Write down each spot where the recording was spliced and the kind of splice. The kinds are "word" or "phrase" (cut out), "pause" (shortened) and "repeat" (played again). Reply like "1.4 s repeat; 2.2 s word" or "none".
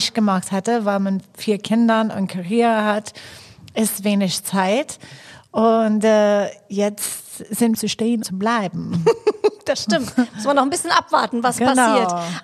7.7 s phrase; 8.2 s word